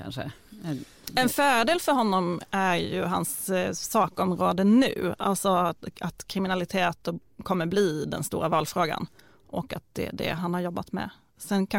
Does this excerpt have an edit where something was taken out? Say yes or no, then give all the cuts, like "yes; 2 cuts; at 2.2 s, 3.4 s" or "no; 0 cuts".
no; 0 cuts